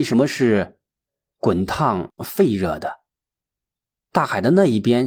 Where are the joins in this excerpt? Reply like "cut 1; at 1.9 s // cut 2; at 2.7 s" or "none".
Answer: none